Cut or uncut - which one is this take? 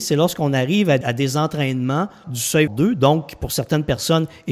cut